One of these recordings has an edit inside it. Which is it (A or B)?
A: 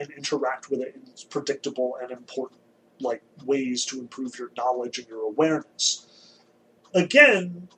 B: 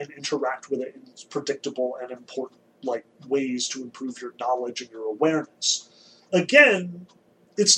B